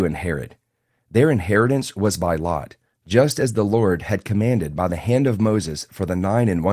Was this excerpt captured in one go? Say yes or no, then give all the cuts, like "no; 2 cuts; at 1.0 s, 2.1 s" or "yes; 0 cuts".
yes; 0 cuts